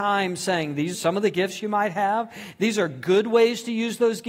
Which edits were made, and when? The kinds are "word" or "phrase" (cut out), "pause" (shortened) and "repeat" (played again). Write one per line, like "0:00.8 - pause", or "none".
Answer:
0:00.9 - word